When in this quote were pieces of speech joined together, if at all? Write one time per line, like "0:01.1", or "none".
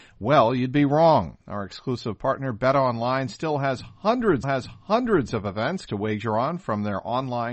0:04.4
0:05.9